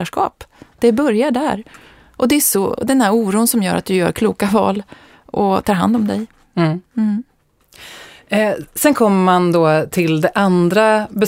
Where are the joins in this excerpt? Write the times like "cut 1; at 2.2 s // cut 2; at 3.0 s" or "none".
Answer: none